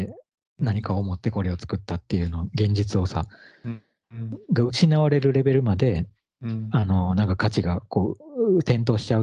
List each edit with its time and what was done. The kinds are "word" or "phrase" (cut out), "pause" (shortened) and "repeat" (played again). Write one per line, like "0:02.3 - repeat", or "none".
none